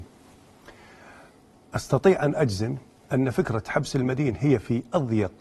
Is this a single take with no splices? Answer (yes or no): yes